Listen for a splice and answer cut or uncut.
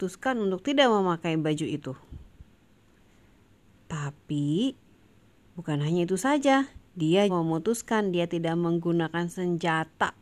cut